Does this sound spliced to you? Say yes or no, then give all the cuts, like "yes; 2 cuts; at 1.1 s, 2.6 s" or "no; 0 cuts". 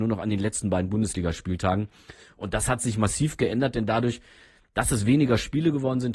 no; 0 cuts